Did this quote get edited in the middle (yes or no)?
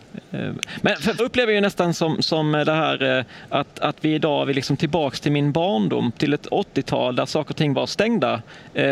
yes